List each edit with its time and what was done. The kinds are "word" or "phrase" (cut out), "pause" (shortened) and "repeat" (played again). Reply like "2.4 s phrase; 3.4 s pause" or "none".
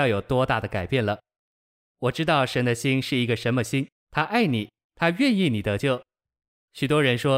3.9 s pause